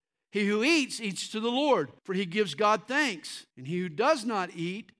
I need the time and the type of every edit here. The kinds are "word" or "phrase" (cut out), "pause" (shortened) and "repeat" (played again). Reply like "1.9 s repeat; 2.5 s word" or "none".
2.0 s pause; 3.5 s pause